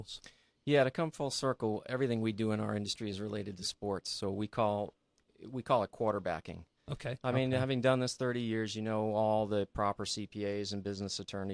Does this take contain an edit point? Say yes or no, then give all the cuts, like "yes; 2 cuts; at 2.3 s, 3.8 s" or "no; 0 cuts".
no; 0 cuts